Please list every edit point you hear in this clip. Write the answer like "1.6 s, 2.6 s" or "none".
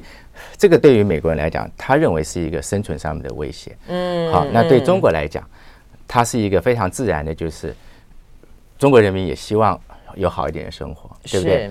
none